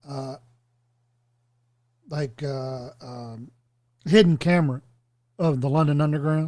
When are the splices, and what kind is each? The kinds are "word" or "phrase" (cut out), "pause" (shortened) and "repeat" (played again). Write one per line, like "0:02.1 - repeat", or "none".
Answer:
none